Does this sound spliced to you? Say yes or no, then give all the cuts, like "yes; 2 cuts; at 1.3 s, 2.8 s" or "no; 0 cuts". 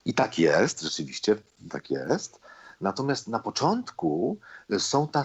yes; 1 cut; at 1.7 s